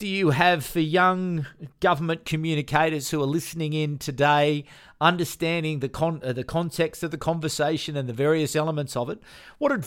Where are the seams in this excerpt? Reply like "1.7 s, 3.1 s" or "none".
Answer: none